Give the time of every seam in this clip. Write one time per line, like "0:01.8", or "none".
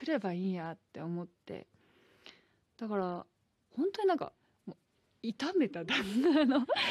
none